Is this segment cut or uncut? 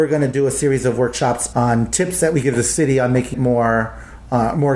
cut